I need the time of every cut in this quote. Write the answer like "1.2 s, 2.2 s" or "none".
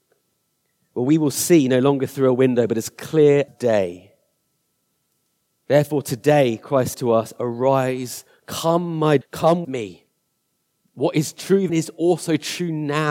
3.5 s, 6.9 s, 9.2 s, 9.6 s, 11.7 s